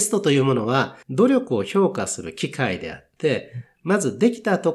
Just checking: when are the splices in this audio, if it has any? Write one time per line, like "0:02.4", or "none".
0:01.0